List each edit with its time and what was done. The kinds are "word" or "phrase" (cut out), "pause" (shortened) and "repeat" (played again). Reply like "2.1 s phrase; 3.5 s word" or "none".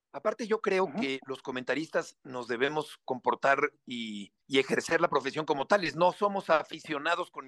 4.4 s pause